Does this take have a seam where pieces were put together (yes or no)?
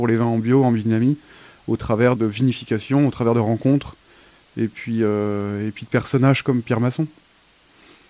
yes